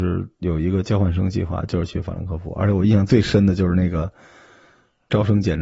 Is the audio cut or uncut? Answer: uncut